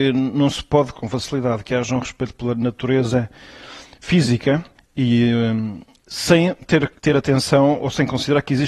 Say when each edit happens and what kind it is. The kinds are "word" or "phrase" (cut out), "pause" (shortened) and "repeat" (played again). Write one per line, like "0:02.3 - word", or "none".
0:00.9 - word
0:04.7 - pause
0:07.0 - pause